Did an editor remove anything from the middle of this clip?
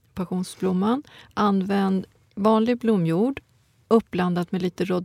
no; 0 cuts

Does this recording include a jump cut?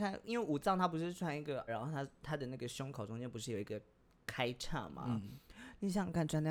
yes; 1 cut; at 1.7 s

